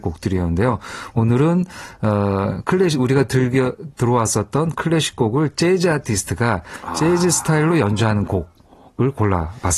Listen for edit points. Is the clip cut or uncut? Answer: uncut